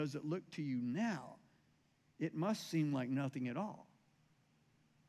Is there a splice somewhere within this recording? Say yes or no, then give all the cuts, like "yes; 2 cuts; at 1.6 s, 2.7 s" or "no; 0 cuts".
no; 0 cuts